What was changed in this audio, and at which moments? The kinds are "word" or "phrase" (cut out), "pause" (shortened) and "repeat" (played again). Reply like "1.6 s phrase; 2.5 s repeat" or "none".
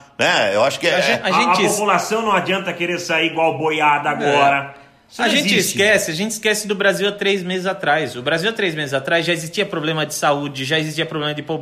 none